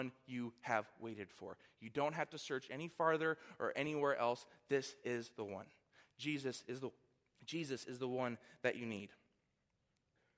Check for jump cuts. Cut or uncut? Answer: uncut